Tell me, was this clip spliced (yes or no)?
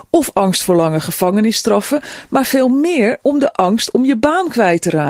no